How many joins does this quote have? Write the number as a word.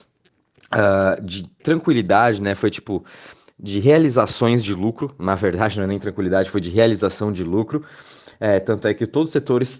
zero